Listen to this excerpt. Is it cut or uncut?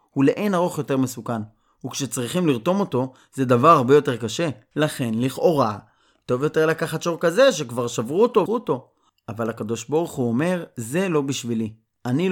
cut